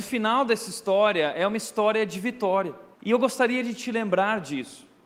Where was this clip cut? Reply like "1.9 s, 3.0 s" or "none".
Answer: 2.9 s